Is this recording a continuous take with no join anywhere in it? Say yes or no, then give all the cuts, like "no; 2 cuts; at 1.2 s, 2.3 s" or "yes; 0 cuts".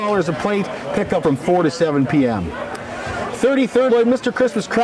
no; 2 cuts; at 1.2 s, 3.9 s